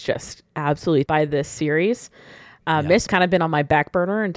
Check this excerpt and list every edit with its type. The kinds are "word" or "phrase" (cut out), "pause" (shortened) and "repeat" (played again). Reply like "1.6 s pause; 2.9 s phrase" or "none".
1.1 s word; 3.1 s word

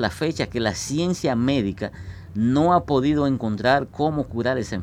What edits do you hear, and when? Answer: none

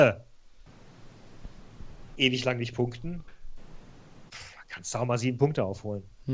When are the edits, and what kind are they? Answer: none

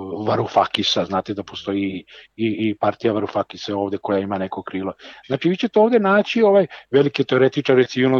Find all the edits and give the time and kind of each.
none

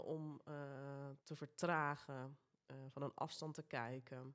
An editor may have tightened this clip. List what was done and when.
1.2 s pause

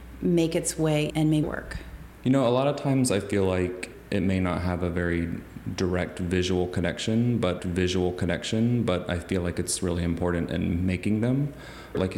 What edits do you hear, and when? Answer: 1.1 s phrase; 1.4 s phrase; 7.6 s repeat

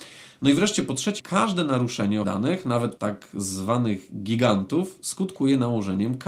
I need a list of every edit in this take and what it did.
1.2 s word; 2.2 s word; 3.0 s word

